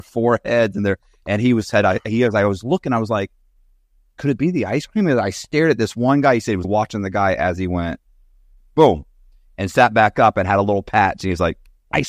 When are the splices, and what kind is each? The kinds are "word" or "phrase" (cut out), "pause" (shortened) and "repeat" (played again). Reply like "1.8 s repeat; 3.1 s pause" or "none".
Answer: 6.6 s word